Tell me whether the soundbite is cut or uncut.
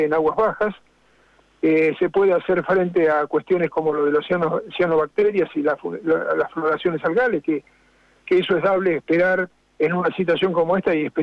uncut